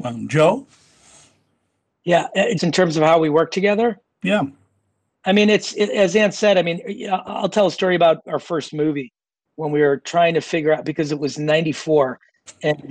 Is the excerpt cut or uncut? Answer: cut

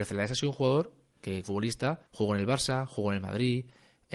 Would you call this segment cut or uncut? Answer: cut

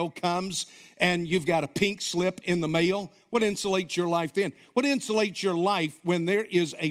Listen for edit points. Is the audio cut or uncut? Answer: uncut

